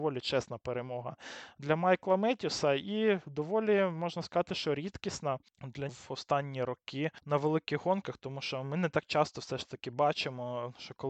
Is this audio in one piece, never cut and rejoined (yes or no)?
no